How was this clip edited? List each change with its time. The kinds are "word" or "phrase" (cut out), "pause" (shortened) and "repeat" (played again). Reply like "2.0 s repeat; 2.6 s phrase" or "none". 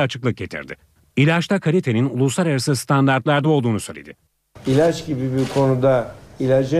none

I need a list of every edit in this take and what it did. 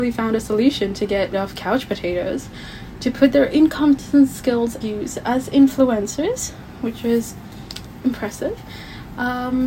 1.3 s word; 4.8 s word; 8.0 s word

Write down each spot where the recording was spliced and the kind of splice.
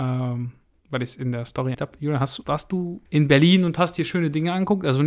1.7 s word; 2.4 s word; 3.1 s word

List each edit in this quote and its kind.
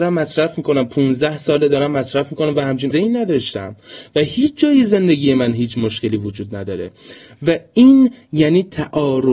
2.9 s word

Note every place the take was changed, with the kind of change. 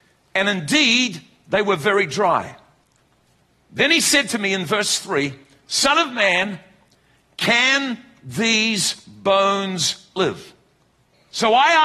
none

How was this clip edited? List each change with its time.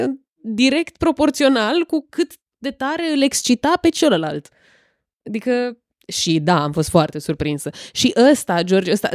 none

